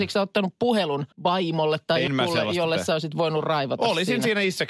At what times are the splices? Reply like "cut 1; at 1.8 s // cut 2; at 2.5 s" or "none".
cut 1; at 1.1 s // cut 2; at 2.1 s